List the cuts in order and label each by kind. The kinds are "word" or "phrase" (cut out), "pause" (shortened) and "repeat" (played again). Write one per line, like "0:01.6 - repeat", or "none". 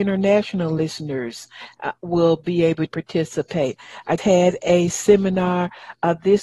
0:02.0 - word
0:02.9 - word
0:04.2 - word